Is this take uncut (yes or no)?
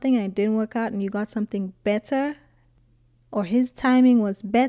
yes